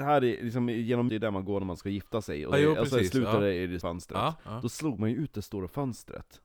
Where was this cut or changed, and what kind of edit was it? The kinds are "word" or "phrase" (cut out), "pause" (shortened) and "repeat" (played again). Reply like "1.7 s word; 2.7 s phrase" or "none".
1.1 s phrase; 2.5 s word; 3.8 s word